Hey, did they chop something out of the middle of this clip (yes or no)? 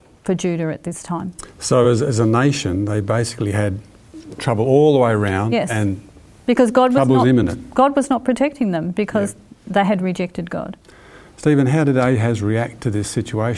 no